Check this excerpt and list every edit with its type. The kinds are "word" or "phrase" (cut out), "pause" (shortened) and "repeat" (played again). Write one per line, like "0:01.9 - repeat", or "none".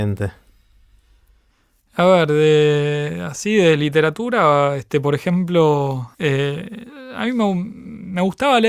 0:06.1 - pause